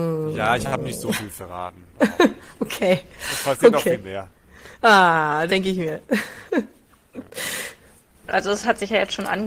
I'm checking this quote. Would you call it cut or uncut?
cut